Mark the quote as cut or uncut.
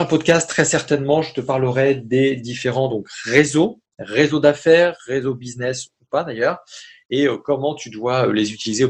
uncut